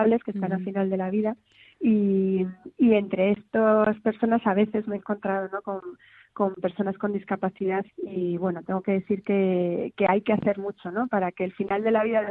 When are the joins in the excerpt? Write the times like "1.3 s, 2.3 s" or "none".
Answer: 7.9 s